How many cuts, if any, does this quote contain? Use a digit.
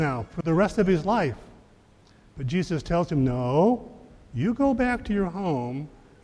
0